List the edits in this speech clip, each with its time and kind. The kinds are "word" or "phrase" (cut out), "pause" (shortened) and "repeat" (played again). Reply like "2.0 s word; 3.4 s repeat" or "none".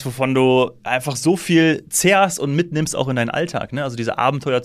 none